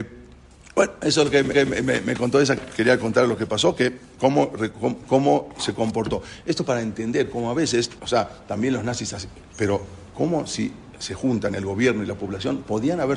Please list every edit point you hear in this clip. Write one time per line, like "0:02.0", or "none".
0:01.5
0:02.6
0:08.0
0:09.5